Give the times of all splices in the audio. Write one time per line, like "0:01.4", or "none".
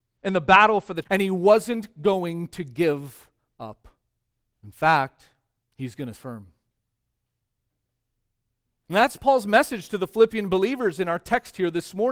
0:01.0
0:04.4
0:05.6
0:06.1